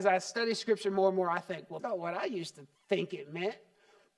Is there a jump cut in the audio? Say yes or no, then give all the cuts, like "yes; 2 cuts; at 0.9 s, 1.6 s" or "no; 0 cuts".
yes; 2 cuts; at 1.8 s, 2.8 s